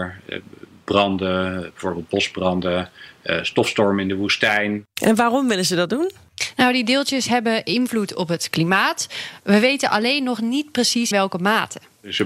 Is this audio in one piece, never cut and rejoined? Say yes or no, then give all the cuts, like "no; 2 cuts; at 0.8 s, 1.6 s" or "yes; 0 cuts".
no; 2 cuts; at 4.9 s, 11.1 s